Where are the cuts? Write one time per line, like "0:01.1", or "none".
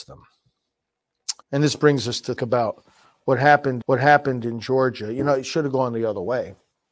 0:01.4
0:02.4
0:03.8

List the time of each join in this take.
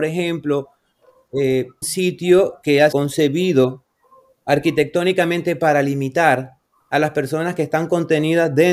0:01.8
0:02.9

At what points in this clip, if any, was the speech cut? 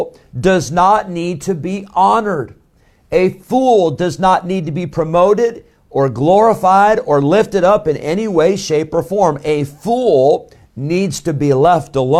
none

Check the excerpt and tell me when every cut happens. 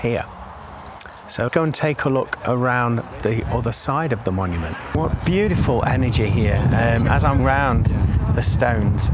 0:01.5
0:07.4

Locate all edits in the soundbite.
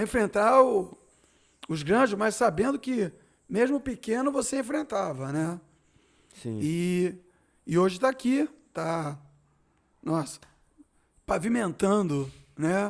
none

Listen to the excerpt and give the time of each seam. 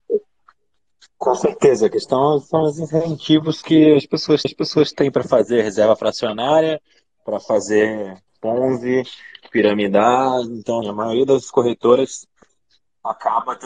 0:04.4
0:08.3
0:10.8

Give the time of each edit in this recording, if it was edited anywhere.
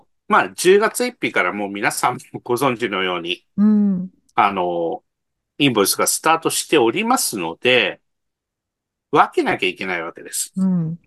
none

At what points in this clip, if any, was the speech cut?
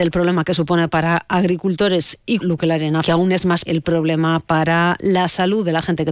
0:02.4
0:03.0
0:03.7

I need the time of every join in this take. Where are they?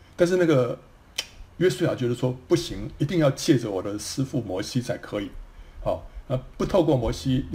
0:01.5

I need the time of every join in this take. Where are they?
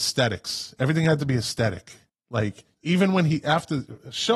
0:02.1

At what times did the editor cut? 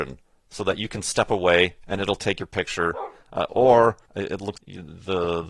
0:04.1
0:04.6

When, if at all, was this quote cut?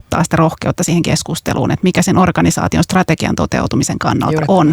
none

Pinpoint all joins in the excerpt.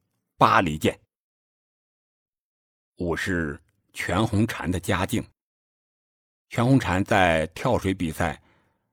none

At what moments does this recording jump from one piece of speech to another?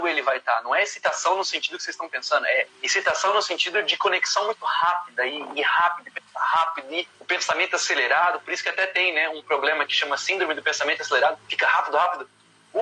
0:02.7
0:07.1
0:11.4

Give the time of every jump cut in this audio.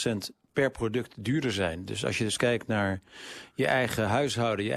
none

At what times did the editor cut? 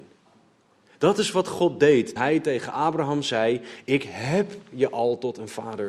0:02.2

